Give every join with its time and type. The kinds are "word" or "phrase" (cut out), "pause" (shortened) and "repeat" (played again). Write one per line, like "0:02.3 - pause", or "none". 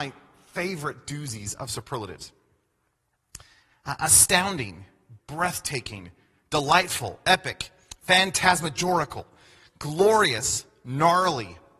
0:05.2 - word

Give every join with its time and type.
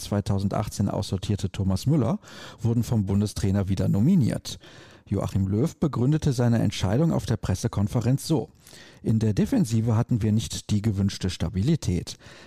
none

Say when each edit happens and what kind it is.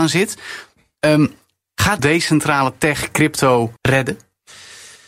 0:02.0 - phrase
0:03.8 - pause

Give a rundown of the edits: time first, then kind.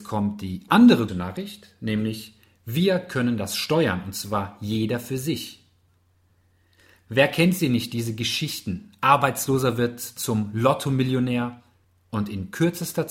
0:01.1 - word

